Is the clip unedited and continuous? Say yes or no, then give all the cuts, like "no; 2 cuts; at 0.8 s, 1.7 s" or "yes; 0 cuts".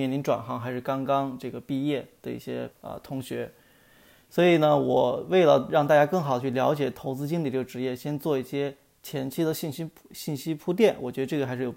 no; 1 cut; at 2.7 s